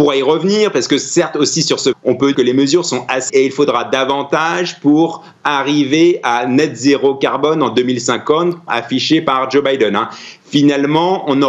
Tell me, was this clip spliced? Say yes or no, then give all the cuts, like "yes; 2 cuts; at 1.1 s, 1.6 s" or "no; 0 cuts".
yes; 4 cuts; at 1.9 s, 2.3 s, 3.3 s, 8.7 s